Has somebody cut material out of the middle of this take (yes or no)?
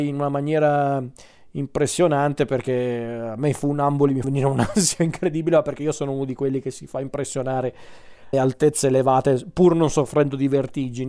yes